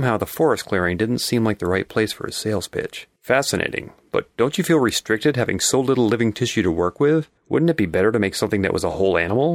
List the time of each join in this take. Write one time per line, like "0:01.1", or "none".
0:03.2
0:07.4